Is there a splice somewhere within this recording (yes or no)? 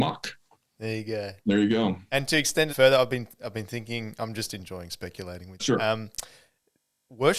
yes